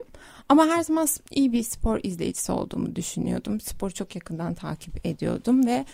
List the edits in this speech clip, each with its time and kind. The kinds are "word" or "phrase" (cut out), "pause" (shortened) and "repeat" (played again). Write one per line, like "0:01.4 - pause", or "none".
none